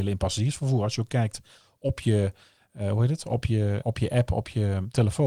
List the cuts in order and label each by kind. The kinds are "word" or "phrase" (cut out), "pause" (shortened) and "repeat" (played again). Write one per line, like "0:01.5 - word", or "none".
0:03.8 - word